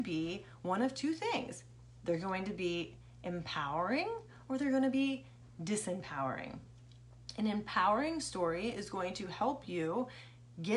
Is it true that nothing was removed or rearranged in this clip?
yes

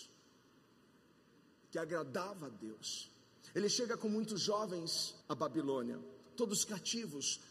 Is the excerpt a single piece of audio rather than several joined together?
no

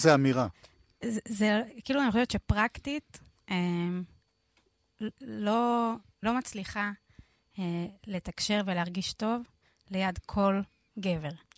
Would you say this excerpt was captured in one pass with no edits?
no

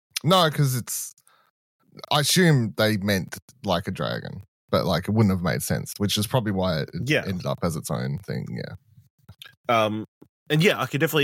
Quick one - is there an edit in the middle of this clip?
no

